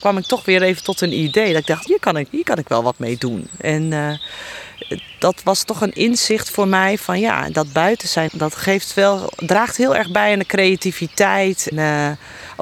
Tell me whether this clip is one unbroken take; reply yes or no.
no